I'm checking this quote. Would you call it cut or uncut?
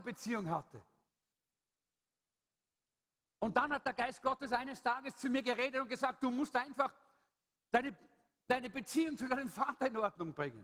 uncut